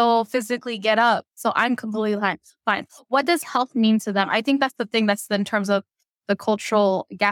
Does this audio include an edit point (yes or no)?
no